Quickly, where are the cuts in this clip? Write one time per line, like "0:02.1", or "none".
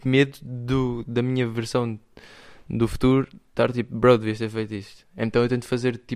none